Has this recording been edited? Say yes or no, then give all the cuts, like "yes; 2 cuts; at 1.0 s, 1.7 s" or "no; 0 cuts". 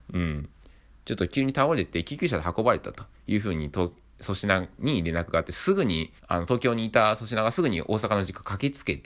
yes; 1 cut; at 6.2 s